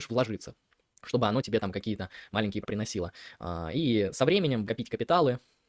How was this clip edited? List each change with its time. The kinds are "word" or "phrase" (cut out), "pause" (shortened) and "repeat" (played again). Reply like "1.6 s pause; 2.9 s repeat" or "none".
2.6 s word; 4.7 s word